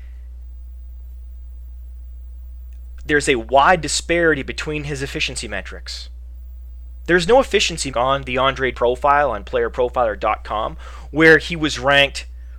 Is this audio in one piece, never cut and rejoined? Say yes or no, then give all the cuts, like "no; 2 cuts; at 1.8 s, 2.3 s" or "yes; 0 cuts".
no; 2 cuts; at 7.9 s, 8.7 s